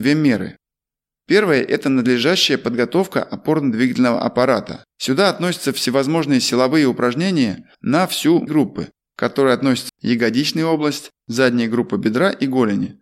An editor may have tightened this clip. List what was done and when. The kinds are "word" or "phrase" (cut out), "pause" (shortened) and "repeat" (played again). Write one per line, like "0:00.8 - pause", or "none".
0:04.9 - pause
0:07.7 - pause
0:08.5 - phrase
0:09.9 - phrase